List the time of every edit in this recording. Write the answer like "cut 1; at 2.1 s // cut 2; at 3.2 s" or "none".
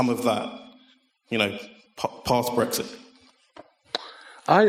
none